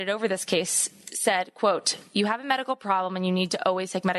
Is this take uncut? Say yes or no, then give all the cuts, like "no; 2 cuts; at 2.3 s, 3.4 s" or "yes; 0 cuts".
yes; 0 cuts